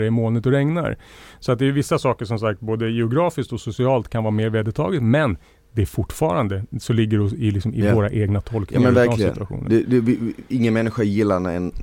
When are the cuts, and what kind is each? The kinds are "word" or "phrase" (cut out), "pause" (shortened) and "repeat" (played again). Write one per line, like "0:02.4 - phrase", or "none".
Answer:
none